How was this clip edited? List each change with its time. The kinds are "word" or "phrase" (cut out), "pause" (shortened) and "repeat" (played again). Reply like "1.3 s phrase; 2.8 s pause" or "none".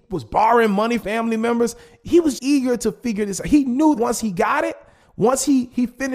1.0 s word; 2.4 s word; 4.0 s word

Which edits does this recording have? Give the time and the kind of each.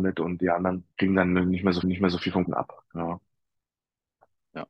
0.9 s pause; 1.8 s repeat; 2.4 s word

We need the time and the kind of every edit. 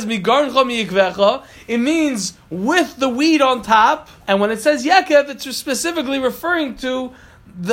4.2 s pause

